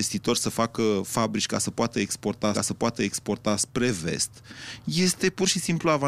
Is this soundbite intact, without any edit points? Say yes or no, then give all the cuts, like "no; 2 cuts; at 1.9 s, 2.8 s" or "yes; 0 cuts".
no; 1 cut; at 2.5 s